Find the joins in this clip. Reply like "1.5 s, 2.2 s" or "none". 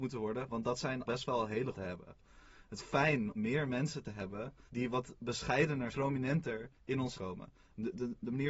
1.1 s, 1.7 s, 2.8 s, 3.4 s, 4.7 s, 5.9 s, 6.8 s, 7.1 s